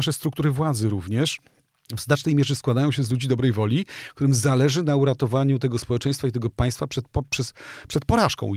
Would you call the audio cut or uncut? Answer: uncut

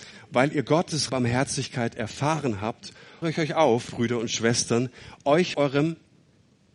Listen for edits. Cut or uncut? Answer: cut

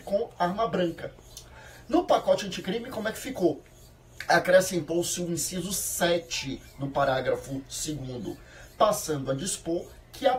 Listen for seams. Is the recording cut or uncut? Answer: uncut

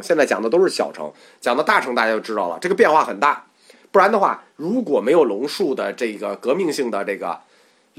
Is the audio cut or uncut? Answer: uncut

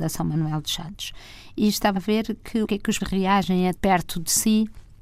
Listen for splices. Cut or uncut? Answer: cut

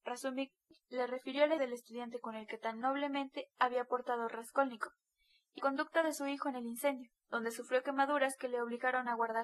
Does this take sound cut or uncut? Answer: cut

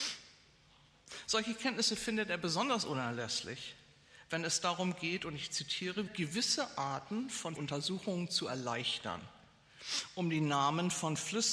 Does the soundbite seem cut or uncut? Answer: cut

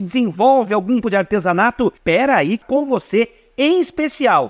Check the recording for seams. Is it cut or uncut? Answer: cut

